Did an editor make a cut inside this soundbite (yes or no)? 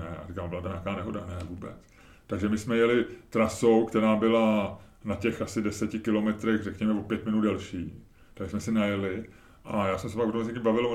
no